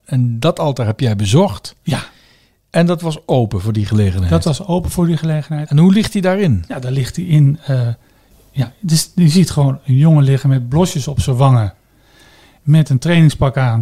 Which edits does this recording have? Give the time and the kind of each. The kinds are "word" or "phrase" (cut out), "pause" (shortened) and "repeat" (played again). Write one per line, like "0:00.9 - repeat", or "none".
none